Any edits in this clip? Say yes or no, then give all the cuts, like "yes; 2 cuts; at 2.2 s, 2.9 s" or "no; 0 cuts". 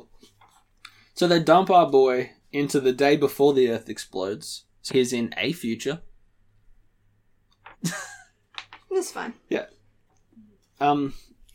yes; 2 cuts; at 4.9 s, 7.7 s